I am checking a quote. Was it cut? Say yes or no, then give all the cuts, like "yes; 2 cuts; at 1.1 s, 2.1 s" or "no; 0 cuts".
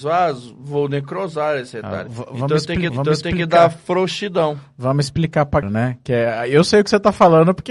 yes; 2 cuts; at 2.9 s, 5.6 s